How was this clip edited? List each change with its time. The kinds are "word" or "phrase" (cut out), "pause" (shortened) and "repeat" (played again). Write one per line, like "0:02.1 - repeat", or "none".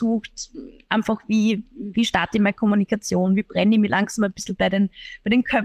none